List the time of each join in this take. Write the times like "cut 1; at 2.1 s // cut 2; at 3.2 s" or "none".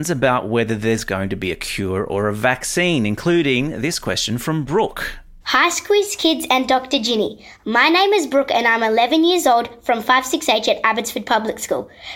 cut 1; at 5.4 s